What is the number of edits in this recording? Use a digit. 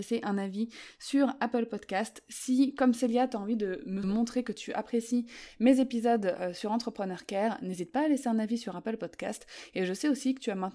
1